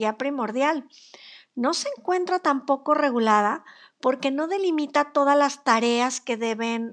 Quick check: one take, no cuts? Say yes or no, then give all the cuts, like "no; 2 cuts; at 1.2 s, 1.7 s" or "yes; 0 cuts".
yes; 0 cuts